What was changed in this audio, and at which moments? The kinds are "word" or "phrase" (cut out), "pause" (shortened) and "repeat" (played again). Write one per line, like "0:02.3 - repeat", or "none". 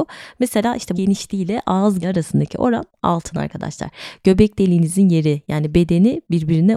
0:01.0 - word
0:02.0 - word